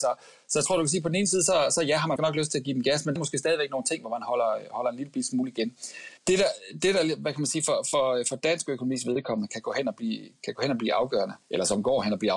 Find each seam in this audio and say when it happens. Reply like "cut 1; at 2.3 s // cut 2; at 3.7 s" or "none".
cut 1; at 2.2 s // cut 2; at 3.2 s // cut 3; at 6.2 s // cut 4; at 11.4 s